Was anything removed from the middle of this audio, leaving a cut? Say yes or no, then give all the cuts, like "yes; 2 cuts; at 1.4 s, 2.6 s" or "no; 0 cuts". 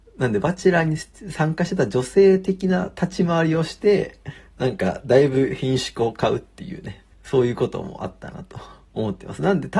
yes; 1 cut; at 7.1 s